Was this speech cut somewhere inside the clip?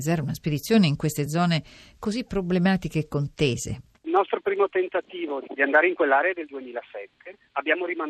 no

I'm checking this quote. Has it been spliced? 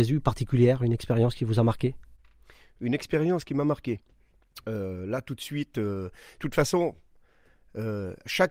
no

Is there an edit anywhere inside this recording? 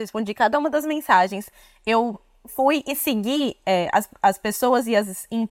no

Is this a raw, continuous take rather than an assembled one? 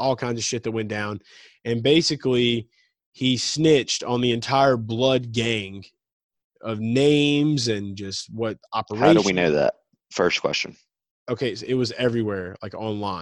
yes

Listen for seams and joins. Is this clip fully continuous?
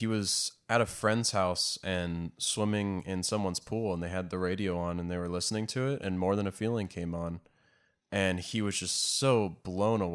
yes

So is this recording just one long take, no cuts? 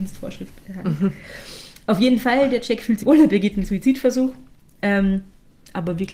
no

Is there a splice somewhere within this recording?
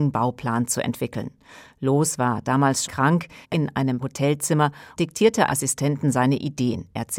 yes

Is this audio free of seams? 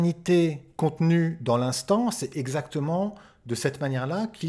yes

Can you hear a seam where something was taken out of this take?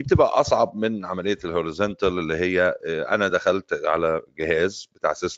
no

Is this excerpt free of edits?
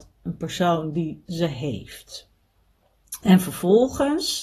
no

